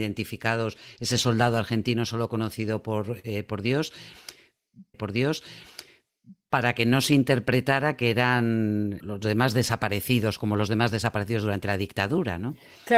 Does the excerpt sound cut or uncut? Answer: cut